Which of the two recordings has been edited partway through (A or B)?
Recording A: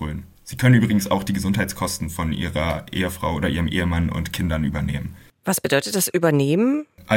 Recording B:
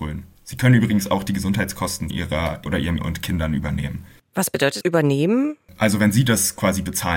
B